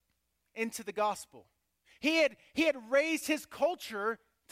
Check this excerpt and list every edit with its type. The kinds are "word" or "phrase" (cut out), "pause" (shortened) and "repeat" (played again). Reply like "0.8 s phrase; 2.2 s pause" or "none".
1.8 s pause